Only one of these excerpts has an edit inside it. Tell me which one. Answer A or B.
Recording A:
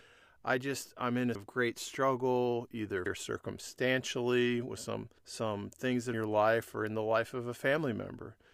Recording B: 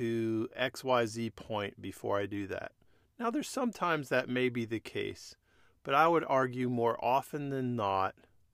A